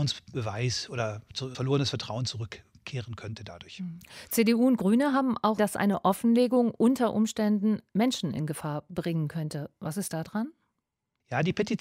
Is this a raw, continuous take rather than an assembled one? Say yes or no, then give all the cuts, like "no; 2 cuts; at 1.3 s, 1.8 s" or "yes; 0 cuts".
no; 2 cuts; at 1.5 s, 5.6 s